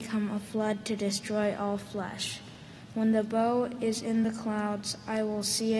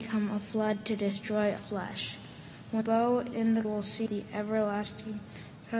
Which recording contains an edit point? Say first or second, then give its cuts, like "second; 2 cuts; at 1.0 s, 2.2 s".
second; 5 cuts; at 1.6 s, 2.8 s, 3.3 s, 3.6 s, 4.1 s